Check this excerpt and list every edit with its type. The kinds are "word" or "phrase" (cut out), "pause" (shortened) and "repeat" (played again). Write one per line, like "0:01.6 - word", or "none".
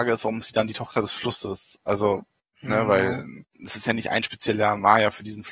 none